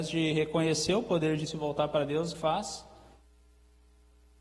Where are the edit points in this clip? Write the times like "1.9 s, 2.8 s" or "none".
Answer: 1.5 s, 2.3 s